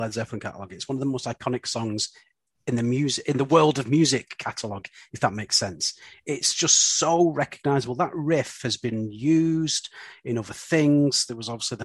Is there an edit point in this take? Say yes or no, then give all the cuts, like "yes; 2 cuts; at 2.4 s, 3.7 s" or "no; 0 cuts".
no; 0 cuts